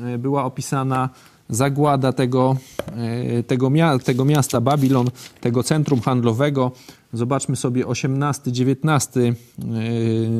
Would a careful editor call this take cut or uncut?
uncut